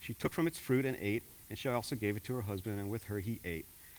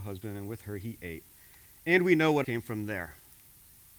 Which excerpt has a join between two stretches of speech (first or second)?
second